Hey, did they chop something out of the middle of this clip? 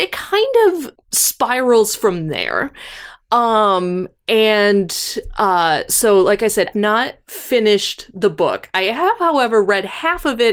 yes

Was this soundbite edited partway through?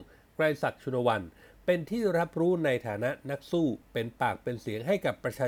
yes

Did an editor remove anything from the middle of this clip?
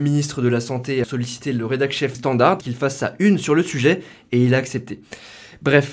yes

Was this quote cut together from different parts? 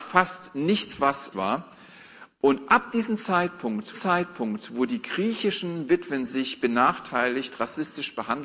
yes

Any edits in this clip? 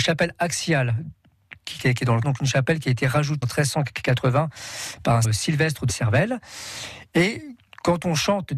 yes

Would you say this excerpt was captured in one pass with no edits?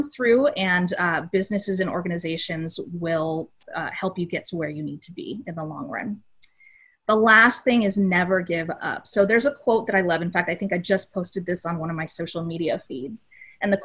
yes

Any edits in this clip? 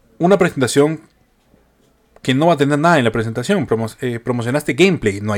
no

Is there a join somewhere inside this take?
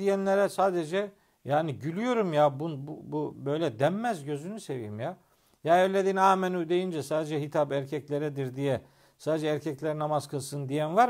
no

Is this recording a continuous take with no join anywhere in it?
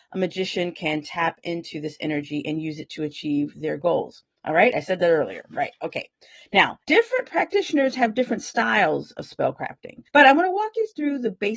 no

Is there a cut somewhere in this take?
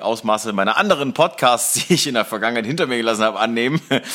no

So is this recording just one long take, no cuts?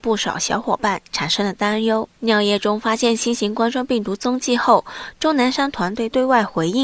no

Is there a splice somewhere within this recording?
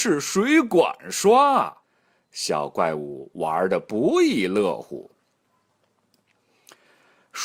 yes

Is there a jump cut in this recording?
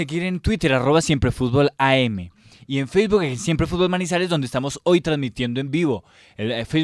no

